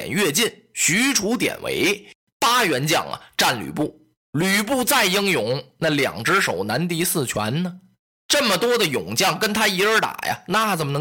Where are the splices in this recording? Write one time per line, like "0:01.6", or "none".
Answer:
none